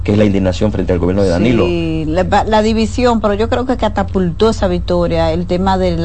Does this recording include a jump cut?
no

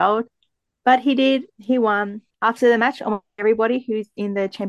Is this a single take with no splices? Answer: no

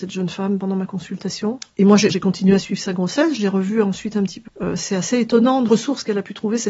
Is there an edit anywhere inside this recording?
yes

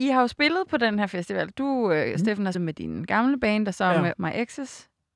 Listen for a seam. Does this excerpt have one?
yes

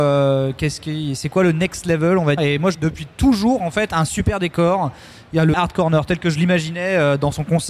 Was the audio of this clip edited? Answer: yes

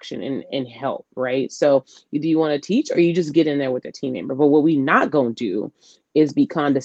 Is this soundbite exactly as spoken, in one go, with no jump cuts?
yes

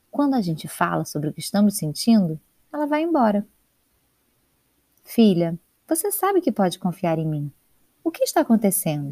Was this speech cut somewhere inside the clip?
no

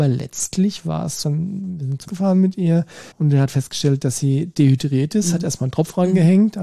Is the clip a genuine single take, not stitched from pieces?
no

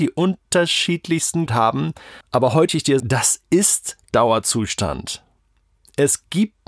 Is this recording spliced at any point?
yes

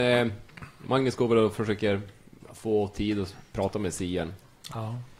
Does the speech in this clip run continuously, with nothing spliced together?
yes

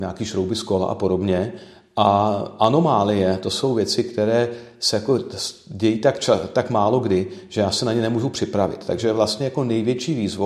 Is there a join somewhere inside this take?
no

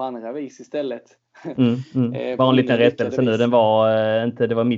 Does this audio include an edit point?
no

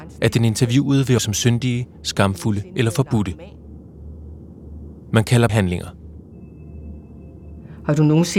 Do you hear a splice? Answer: yes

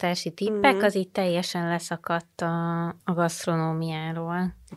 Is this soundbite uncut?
no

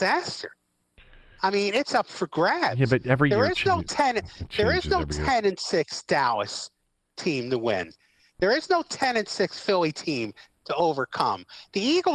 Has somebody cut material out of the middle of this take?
no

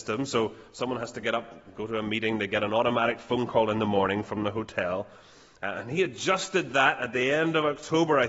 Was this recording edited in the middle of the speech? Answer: no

